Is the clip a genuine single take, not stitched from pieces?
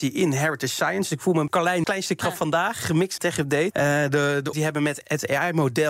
no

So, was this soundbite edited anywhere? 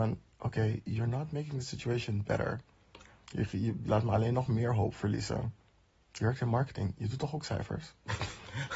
no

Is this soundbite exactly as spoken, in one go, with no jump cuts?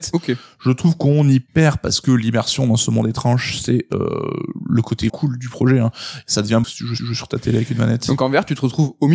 no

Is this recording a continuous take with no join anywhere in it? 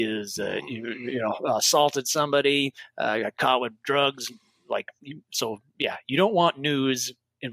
yes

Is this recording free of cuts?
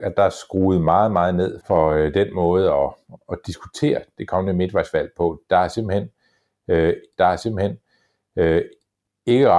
no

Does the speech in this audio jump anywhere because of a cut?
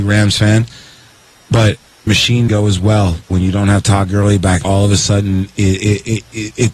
yes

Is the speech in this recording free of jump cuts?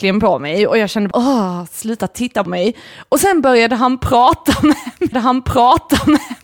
no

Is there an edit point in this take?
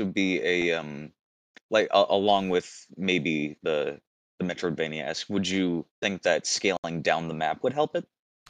yes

